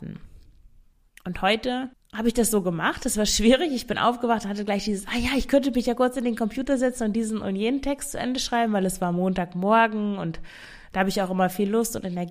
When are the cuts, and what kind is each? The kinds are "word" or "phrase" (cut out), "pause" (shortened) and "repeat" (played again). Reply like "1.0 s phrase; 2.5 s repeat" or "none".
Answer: none